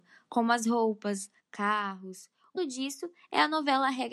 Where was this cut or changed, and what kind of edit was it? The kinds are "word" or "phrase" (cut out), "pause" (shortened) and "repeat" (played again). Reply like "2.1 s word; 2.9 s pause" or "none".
1.4 s word; 2.6 s word